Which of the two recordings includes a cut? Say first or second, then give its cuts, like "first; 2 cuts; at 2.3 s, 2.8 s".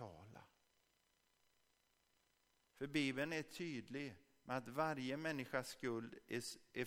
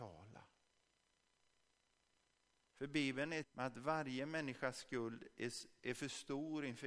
second; 1 cut; at 3.4 s